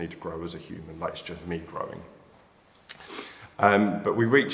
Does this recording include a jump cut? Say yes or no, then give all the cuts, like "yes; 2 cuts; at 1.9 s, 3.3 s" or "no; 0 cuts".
no; 0 cuts